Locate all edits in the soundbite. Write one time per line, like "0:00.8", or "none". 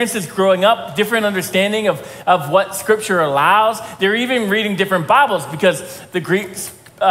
none